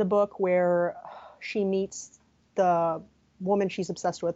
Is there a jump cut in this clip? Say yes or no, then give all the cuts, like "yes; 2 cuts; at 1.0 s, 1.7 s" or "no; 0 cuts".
yes; 1 cut; at 2.4 s